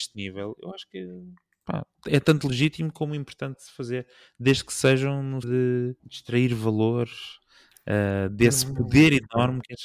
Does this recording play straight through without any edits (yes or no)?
no